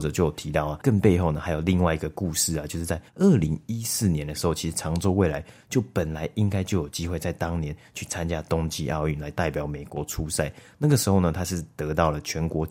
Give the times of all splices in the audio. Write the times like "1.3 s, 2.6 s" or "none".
3.1 s